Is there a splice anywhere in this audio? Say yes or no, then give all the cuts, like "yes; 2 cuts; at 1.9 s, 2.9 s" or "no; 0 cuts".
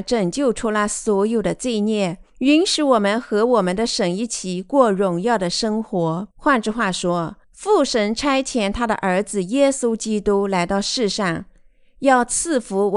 yes; 3 cuts; at 2.3 s, 6.3 s, 7.4 s